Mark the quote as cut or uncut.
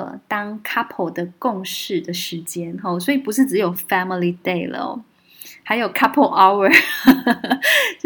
uncut